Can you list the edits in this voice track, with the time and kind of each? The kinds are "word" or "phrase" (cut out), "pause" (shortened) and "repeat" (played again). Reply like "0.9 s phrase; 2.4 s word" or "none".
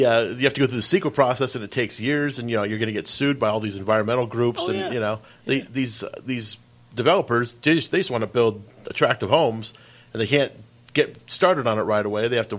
none